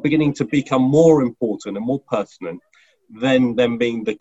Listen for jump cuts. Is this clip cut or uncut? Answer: uncut